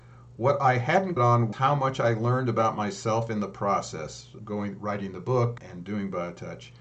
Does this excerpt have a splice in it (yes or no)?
yes